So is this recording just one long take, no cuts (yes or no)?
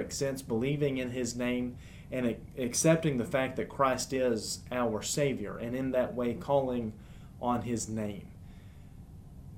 yes